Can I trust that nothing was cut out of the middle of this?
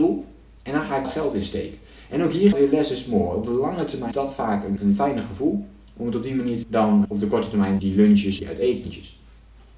no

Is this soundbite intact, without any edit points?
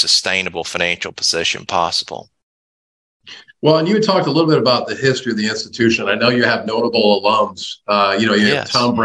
yes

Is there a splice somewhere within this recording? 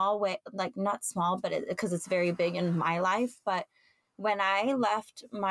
no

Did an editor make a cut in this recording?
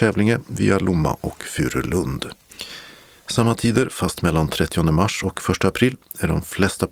no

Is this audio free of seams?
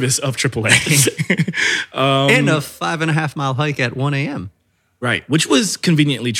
yes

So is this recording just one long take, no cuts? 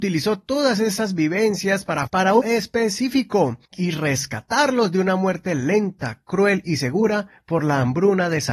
no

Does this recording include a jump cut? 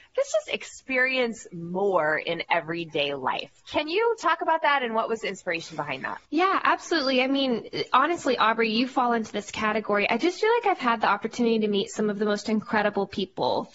yes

